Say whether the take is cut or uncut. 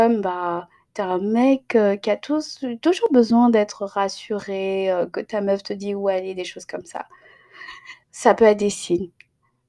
cut